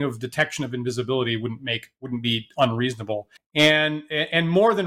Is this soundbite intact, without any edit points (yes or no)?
no